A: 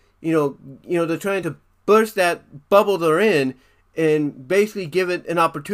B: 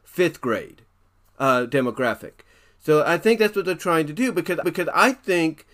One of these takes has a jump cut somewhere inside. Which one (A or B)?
B